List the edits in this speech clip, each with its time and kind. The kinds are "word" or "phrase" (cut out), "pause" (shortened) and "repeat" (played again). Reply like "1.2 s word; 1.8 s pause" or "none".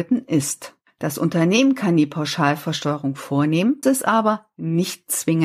3.8 s word

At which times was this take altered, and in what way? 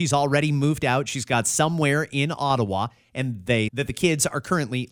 3.7 s word

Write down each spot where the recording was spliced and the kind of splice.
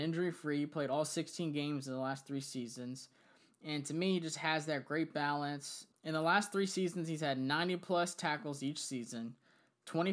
none

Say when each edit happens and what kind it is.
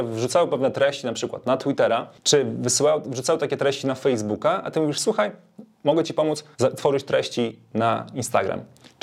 6.5 s pause

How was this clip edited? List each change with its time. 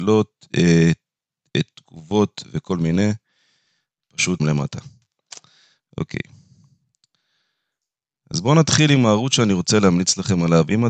4.4 s word

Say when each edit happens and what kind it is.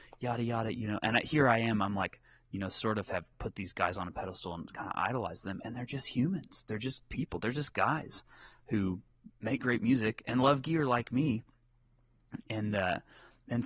none

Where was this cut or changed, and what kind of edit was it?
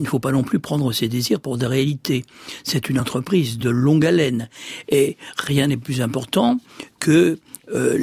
none

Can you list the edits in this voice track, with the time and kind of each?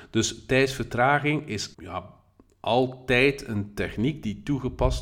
1.7 s pause

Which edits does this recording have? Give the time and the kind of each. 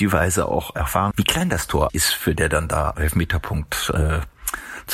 1.1 s word; 1.9 s word; 2.4 s word; 2.9 s word

